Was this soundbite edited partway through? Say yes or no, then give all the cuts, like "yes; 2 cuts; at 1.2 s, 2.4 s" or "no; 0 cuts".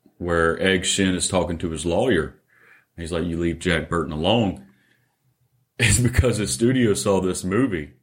no; 0 cuts